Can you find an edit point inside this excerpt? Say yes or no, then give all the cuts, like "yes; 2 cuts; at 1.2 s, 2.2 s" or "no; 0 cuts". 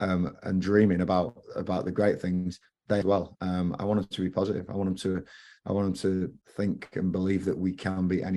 yes; 2 cuts; at 3.0 s, 6.4 s